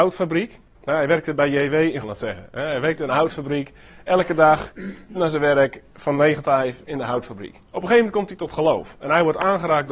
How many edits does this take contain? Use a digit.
4